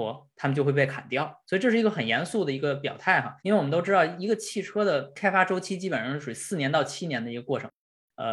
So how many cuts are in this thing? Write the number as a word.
one